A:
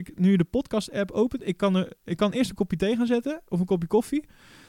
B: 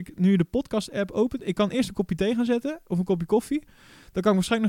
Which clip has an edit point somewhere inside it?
B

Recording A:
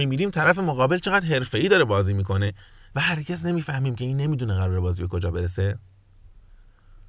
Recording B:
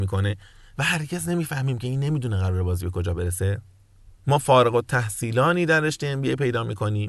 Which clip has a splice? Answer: B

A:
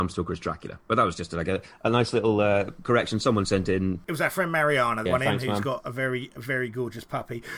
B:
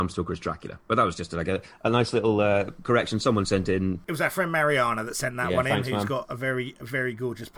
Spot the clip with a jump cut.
A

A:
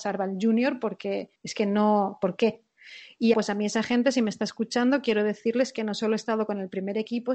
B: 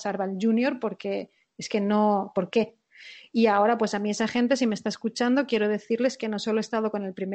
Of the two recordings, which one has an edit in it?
A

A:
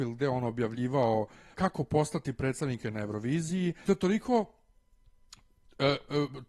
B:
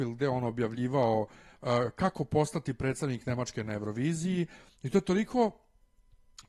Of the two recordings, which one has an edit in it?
A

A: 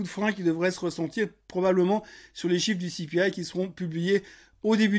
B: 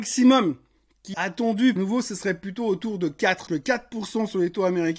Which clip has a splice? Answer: B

